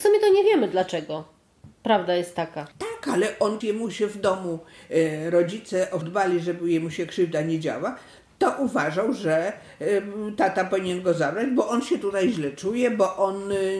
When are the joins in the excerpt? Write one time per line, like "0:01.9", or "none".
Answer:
0:02.7
0:03.6
0:06.0